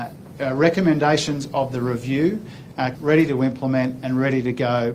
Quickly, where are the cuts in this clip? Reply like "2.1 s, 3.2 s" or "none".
2.9 s